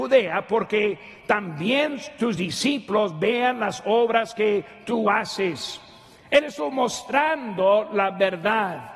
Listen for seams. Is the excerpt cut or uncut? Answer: uncut